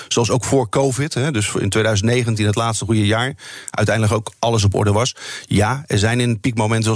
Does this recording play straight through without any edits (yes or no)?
yes